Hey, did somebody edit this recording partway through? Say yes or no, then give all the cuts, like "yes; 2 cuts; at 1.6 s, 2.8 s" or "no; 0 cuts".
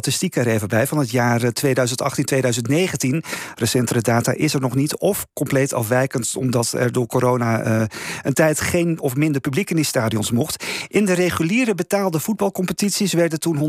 no; 0 cuts